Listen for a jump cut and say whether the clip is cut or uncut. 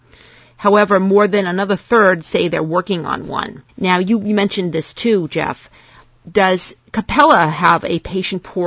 cut